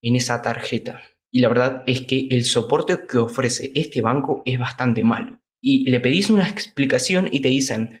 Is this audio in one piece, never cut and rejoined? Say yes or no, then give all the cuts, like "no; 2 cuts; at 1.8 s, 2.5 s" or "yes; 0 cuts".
yes; 0 cuts